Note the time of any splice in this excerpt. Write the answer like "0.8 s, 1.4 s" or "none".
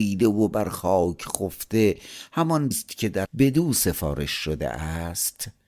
2.7 s, 3.3 s